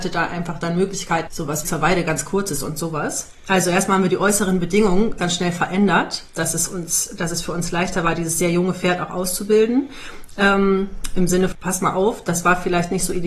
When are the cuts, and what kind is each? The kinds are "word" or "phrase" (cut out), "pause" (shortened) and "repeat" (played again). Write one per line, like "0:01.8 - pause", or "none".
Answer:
0:01.3 - phrase
0:01.6 - phrase
0:05.2 - word
0:11.5 - word